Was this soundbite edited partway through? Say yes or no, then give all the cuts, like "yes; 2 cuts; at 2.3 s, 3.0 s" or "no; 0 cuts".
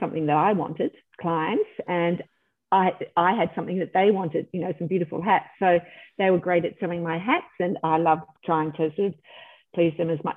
no; 0 cuts